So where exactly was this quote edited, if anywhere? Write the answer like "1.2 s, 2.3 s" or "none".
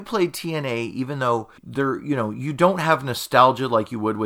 1.6 s